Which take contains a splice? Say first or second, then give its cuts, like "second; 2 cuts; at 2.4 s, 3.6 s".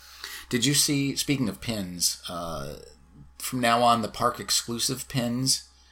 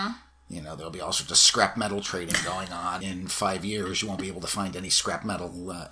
second; 1 cut; at 3.0 s